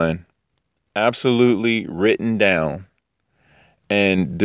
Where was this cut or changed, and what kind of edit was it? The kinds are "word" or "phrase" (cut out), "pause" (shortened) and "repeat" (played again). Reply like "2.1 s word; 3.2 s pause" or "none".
none